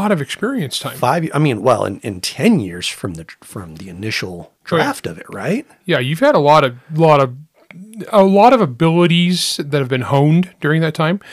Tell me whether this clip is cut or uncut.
cut